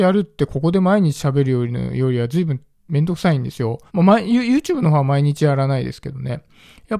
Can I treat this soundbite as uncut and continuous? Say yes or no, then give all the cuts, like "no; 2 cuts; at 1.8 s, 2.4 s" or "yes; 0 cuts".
no; 1 cut; at 3.9 s